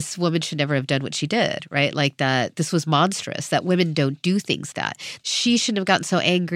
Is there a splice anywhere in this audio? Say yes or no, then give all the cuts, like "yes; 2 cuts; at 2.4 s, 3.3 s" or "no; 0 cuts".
yes; 2 cuts; at 2.5 s, 4.7 s